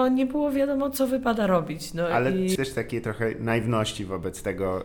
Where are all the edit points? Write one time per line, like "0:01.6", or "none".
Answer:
0:02.6